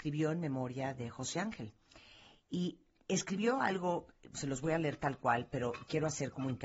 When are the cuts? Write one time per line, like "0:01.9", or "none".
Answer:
none